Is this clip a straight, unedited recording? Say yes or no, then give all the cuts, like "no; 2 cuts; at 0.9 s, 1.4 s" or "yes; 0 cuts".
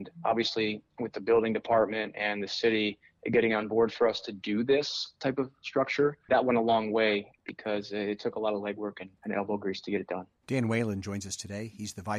no; 3 cuts; at 6.3 s, 9.2 s, 10.4 s